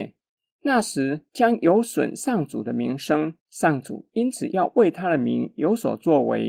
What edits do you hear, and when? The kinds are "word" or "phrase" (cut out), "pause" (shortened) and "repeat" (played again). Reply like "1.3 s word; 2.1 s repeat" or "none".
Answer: 3.4 s pause